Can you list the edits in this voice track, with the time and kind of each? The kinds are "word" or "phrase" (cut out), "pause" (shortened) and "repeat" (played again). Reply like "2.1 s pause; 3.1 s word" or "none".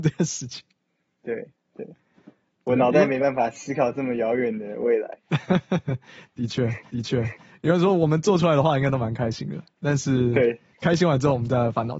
6.9 s repeat; 10.7 s pause